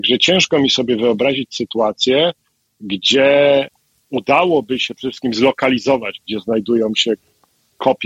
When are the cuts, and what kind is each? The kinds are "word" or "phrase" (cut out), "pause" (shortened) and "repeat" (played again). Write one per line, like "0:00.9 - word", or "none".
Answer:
none